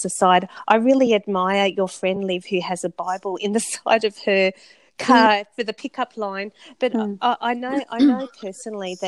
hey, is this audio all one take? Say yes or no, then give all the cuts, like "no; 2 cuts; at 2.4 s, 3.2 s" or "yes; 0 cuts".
yes; 0 cuts